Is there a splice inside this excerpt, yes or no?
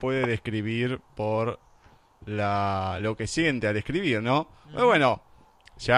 no